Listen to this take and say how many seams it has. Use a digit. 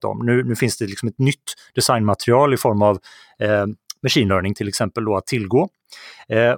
0